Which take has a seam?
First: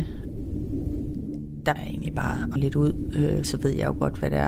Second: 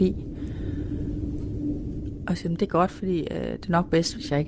first; 3 cuts; at 1.8 s, 2.6 s, 3.4 s

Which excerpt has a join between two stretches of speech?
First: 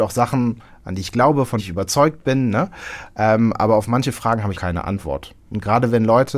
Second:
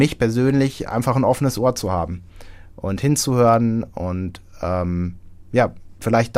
first; 2 cuts; at 1.6 s, 4.5 s

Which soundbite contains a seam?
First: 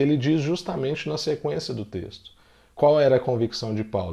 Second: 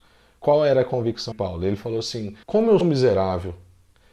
second; 3 cuts; at 1.3 s, 2.4 s, 2.8 s

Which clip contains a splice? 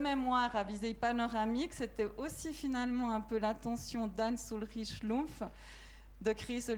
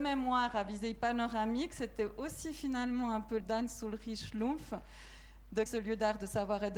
second; 2 cuts; at 3.4 s, 5.7 s

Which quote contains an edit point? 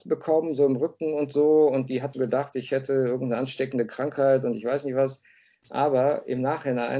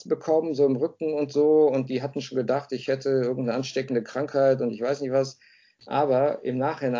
first; 1 cut; at 2.1 s

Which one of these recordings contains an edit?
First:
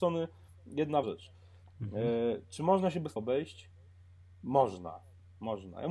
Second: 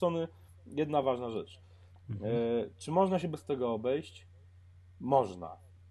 first; 2 cuts; at 1.0 s, 3.2 s

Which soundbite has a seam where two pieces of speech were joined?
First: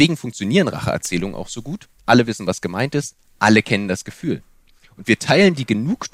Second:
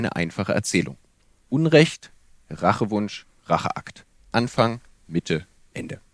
first; 1 cut; at 2.0 s

